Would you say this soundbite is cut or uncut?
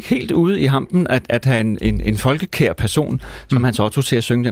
uncut